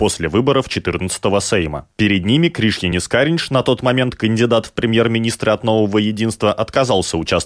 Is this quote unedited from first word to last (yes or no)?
yes